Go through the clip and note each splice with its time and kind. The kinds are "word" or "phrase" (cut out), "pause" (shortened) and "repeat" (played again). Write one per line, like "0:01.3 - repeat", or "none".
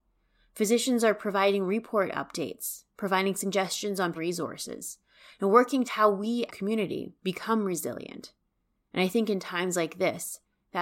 0:04.2 - phrase
0:05.9 - phrase
0:06.5 - phrase
0:07.2 - pause

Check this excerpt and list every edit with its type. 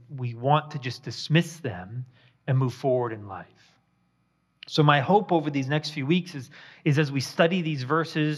none

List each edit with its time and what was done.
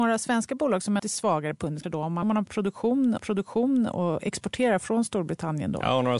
0:01.0 - phrase
0:01.8 - word
0:02.2 - phrase
0:03.2 - repeat

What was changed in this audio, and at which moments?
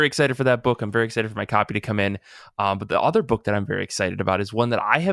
none

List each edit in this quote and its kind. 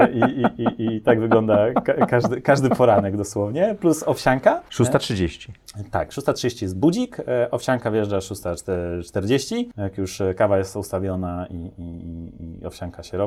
none

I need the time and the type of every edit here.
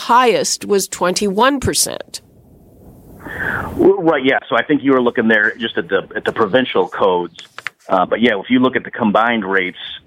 none

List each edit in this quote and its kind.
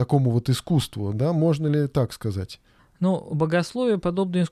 0:02.8 - pause

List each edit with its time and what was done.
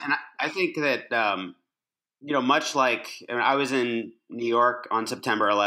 none

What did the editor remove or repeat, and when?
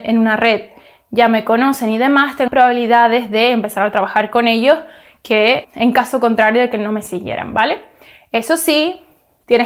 0:02.5 - word
0:05.6 - word

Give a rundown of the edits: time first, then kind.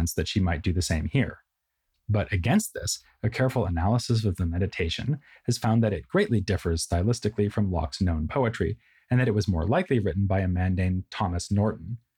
none

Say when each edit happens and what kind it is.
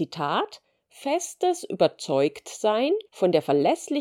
0:03.1 - pause

